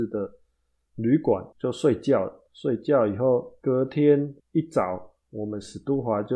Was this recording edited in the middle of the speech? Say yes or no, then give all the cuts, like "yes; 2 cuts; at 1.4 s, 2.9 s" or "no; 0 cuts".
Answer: yes; 5 cuts; at 1.5 s, 2.5 s, 3.6 s, 4.4 s, 5.2 s